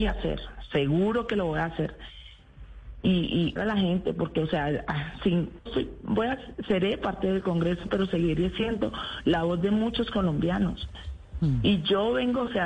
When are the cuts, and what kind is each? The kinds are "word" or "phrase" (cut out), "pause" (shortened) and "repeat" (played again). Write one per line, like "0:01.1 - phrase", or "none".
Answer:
0:03.6 - phrase
0:05.7 - word